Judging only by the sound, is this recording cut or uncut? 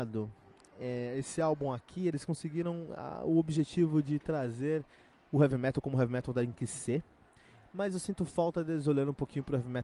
uncut